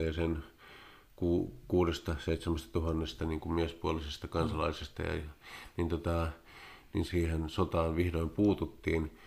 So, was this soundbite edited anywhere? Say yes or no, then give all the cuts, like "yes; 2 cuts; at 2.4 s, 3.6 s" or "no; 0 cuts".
yes; 1 cut; at 7.1 s